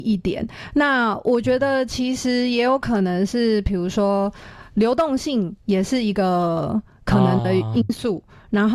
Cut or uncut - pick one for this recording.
cut